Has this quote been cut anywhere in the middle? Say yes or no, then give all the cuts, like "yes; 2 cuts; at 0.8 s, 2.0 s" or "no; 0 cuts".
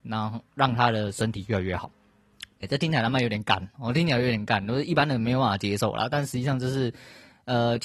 yes; 1 cut; at 2.6 s